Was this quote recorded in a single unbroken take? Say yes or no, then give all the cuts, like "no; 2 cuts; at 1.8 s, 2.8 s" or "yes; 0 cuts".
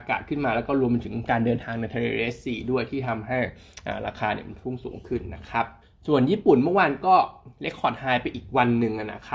no; 1 cut; at 5.8 s